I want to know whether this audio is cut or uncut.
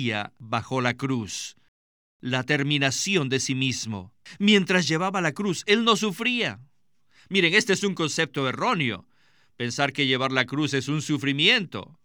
uncut